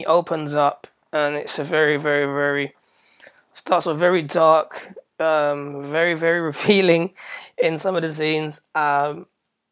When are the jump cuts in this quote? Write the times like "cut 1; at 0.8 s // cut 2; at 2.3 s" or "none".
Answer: none